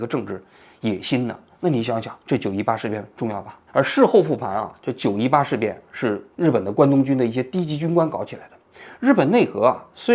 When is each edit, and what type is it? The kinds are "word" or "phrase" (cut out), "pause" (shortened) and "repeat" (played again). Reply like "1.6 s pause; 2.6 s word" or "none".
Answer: 2.2 s pause; 3.7 s pause; 6.3 s pause